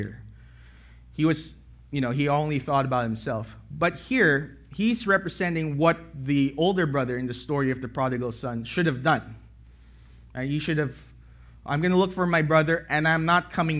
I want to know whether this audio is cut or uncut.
uncut